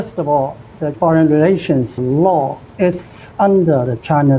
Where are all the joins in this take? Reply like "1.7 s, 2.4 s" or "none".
0.9 s, 2.0 s, 3.3 s

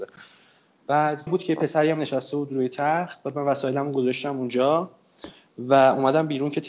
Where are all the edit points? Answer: 1.3 s

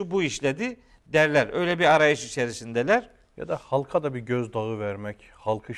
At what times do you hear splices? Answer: none

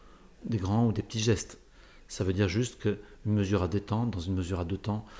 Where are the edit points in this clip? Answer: none

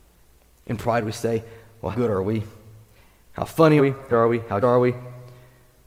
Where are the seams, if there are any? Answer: 1.9 s, 3.8 s, 4.1 s, 4.6 s

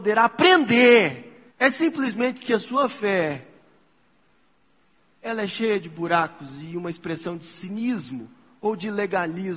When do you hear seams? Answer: 1.5 s

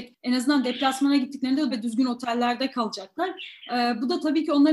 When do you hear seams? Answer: 1.7 s

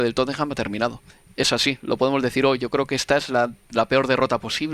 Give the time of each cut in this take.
none

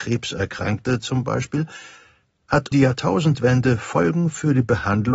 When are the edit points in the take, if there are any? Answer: 2.7 s

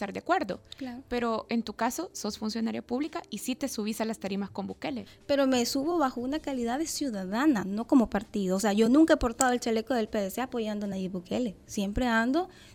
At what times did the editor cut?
none

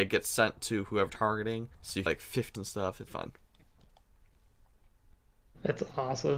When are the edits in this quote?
1.1 s, 1.7 s, 2.1 s, 2.5 s, 3.1 s

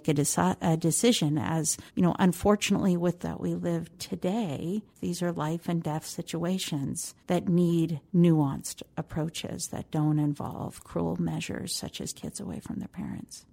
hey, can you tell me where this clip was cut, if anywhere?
1.9 s, 3.2 s, 4.9 s, 7.2 s, 8.1 s, 12.1 s

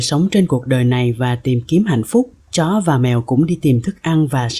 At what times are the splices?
2.4 s

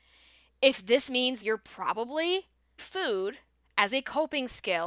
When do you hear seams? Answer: 1.1 s, 1.4 s, 2.8 s

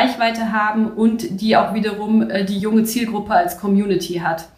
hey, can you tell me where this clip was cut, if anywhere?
none

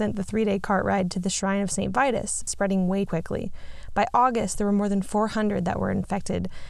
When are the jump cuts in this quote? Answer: 2.5 s, 3.1 s

